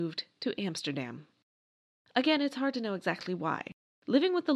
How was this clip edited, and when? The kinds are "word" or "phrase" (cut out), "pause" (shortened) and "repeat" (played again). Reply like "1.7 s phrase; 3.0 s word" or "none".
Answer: none